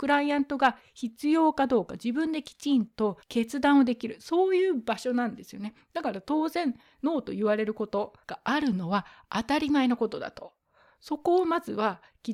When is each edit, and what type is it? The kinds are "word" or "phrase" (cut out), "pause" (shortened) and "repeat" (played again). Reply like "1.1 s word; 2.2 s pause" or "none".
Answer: 3.2 s pause; 8.2 s pause